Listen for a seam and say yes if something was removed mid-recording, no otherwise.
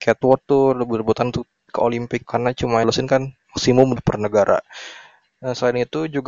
yes